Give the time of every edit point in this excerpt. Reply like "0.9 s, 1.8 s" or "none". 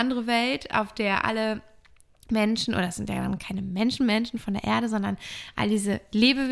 none